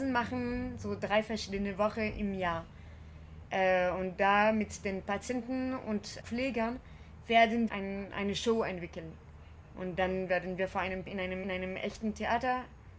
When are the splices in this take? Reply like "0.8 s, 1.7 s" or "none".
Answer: 6.2 s, 7.7 s, 11.1 s, 11.4 s